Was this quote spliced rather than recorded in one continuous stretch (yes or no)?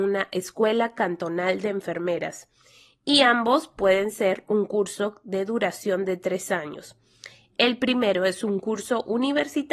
no